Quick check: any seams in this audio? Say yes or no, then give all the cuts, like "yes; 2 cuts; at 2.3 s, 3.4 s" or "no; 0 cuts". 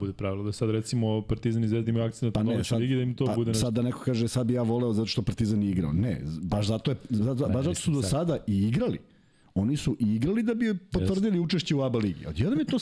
no; 0 cuts